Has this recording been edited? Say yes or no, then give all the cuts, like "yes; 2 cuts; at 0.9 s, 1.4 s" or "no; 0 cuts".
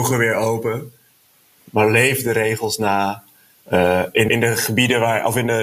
yes; 1 cut; at 4.3 s